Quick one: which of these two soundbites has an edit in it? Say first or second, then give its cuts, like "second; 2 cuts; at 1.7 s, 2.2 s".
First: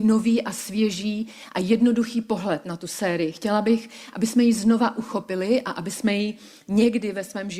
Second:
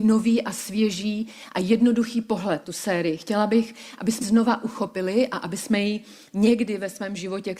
second; 2 cuts; at 2.6 s, 4.2 s